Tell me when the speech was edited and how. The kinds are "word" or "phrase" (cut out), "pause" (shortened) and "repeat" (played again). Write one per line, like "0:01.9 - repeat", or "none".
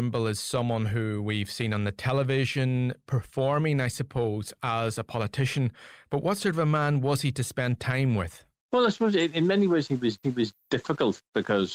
0:10.2 - repeat